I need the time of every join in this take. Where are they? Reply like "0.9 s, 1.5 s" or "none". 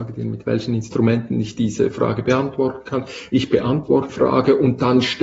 4.1 s